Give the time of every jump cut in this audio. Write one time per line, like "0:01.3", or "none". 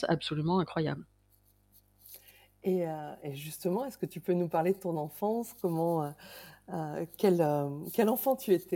none